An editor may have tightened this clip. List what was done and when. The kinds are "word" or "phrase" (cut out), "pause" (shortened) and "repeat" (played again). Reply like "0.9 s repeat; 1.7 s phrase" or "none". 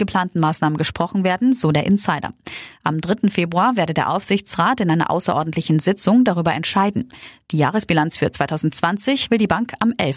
none